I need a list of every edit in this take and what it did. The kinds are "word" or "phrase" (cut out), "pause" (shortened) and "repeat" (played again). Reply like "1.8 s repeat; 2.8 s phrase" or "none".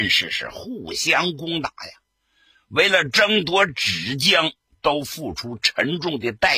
none